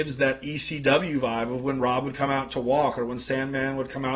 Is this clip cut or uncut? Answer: uncut